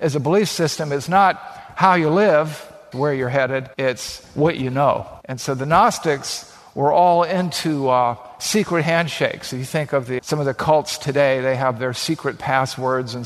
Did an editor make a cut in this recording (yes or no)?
yes